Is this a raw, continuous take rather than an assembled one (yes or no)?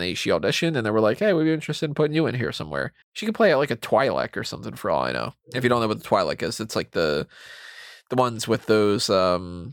no